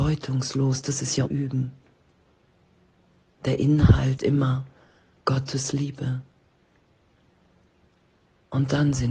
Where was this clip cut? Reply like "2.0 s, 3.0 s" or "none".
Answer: 1.3 s, 4.2 s